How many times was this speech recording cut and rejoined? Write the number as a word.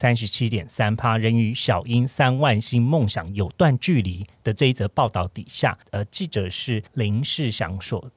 one